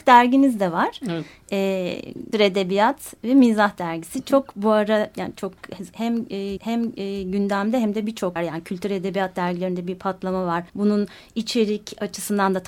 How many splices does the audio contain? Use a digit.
4